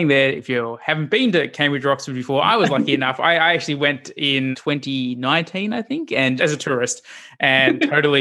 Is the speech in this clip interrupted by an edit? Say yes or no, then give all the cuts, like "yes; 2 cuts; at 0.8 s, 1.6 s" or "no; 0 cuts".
yes; 2 cuts; at 4.5 s, 6.4 s